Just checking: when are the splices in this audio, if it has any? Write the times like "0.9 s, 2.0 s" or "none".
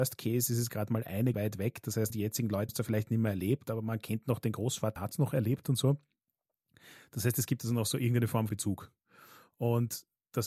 1.3 s, 2.1 s, 2.7 s, 5.0 s, 8.5 s